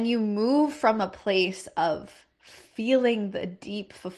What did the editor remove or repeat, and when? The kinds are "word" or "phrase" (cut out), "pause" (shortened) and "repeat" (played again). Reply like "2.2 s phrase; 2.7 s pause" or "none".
none

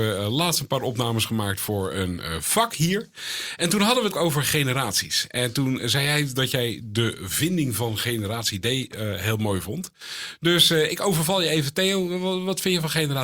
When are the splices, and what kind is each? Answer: 4.1 s word

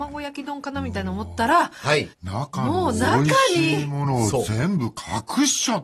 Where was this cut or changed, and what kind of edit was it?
2.1 s pause

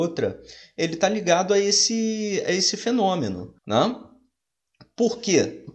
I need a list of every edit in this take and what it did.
3.6 s pause

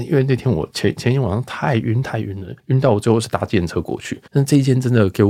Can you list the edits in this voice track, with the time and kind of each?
2.6 s pause; 4.3 s pause

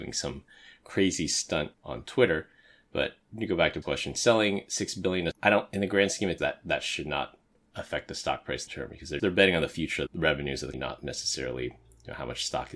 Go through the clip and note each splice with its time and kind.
1.7 s word; 3.8 s word; 5.3 s word; 6.4 s word; 8.7 s word; 9.2 s word; 10.1 s word; 10.7 s word

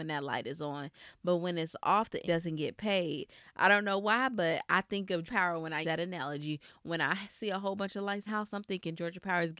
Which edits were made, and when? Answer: 2.2 s word; 5.3 s word; 5.8 s word; 8.3 s phrase

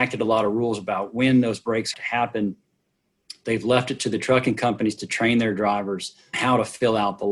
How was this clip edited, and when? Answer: 1.9 s word; 6.3 s word

